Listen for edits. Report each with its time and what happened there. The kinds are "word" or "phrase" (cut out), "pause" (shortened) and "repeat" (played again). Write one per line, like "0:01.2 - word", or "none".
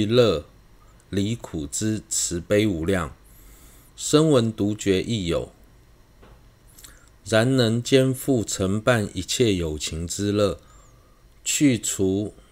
none